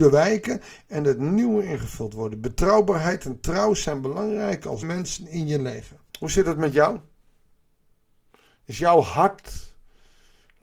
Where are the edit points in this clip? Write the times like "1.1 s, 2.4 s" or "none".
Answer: 4.8 s, 6.1 s